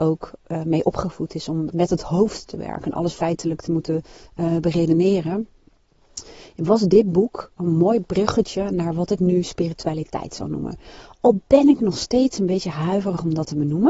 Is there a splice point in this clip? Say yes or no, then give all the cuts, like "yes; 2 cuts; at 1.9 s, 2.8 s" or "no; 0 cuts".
no; 0 cuts